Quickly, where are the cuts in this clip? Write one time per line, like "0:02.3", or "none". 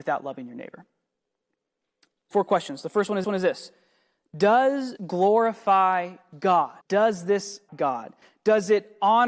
0:02.3
0:03.2
0:05.0
0:06.8
0:07.7